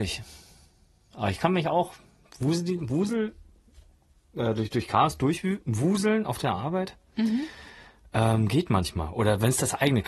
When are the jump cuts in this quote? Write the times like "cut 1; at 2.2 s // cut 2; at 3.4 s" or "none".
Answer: none